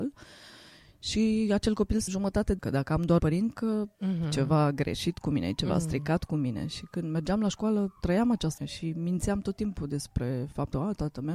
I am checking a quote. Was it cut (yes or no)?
yes